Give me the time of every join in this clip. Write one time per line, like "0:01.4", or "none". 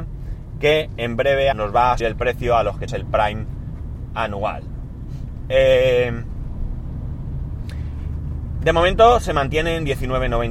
0:01.5
0:02.0
0:02.9